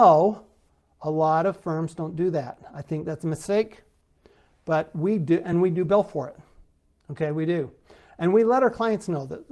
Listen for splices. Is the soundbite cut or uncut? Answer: uncut